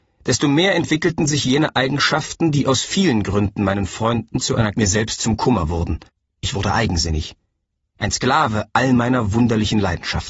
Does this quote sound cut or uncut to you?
cut